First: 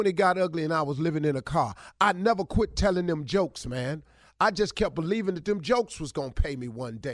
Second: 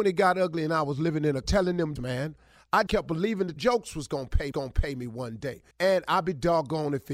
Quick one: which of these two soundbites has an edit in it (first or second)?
second